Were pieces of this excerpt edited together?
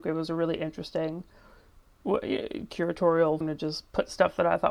yes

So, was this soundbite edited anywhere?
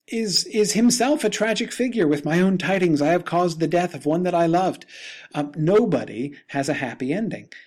no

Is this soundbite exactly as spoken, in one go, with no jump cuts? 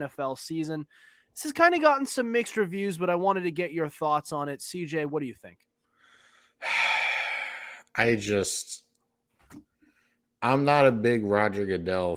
yes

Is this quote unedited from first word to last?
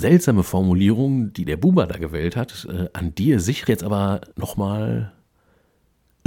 no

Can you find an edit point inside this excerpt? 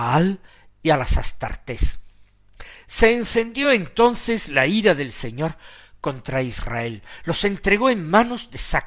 no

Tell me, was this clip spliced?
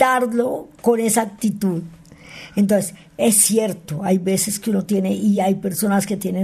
no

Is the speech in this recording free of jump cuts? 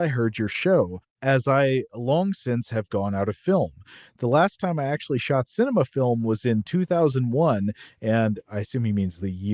yes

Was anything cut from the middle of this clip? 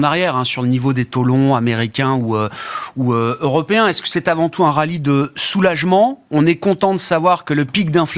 no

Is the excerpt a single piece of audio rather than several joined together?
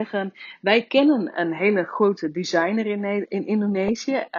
yes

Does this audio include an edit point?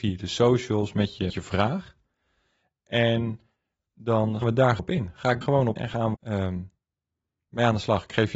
yes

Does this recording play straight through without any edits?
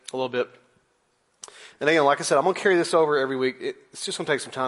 yes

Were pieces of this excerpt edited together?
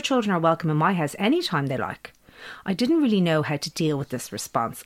no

